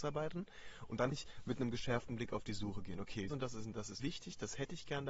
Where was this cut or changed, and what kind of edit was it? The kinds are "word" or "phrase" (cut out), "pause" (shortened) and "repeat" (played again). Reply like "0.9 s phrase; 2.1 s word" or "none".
1.1 s word; 3.3 s word; 4.0 s word